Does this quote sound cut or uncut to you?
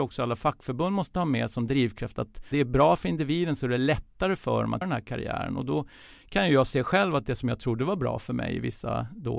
cut